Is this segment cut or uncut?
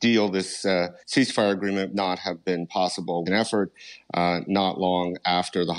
cut